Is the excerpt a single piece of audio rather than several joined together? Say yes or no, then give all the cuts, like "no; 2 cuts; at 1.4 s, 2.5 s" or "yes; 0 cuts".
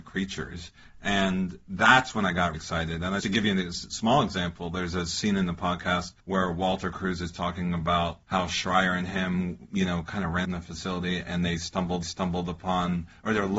no; 6 cuts; at 2.5 s, 3.2 s, 6.2 s, 8.2 s, 10.4 s, 12.0 s